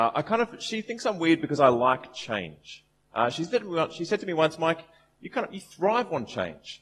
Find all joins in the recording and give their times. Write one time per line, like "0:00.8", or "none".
none